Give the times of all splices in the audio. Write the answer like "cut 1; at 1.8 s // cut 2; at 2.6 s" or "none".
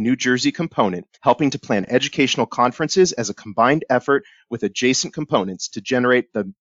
cut 1; at 1.1 s